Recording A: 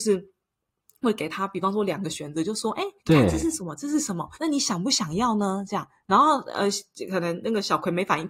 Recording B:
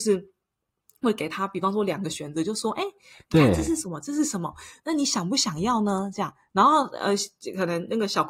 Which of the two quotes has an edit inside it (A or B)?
A